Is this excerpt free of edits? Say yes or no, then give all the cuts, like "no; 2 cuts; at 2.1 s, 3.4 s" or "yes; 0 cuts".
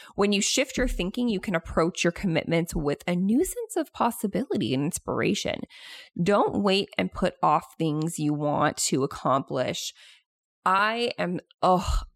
yes; 0 cuts